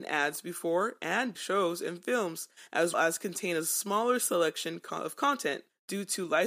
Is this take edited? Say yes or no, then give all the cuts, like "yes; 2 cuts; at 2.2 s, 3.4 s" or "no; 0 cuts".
yes; 2 cuts; at 1.3 s, 2.9 s